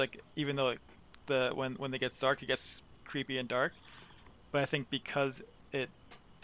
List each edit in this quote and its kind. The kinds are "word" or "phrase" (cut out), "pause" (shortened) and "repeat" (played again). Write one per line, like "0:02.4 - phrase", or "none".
0:03.0 - word